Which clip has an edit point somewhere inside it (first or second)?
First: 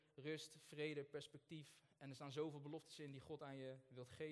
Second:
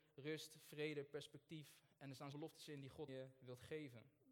second